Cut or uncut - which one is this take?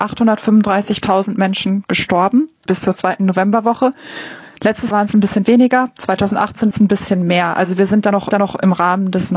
cut